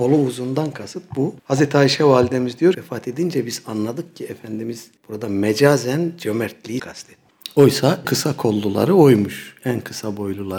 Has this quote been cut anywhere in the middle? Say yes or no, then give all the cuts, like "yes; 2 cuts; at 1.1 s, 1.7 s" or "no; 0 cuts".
yes; 5 cuts; at 1.4 s, 2.7 s, 5.0 s, 6.8 s, 8.0 s